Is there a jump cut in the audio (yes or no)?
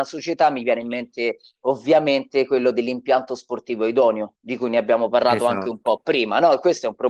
no